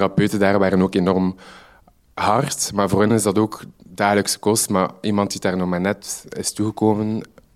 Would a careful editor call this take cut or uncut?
uncut